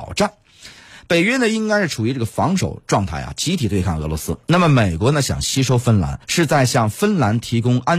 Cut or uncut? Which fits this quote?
cut